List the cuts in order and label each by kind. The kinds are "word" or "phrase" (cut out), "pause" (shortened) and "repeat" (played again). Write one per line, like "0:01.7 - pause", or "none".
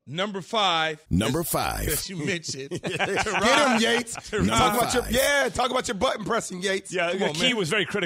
0:01.1 - pause

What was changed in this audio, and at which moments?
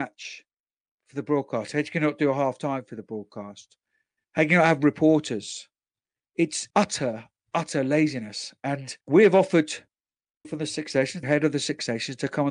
0:03.9 - pause
0:06.7 - word
0:09.0 - pause
0:10.4 - word
0:11.2 - phrase

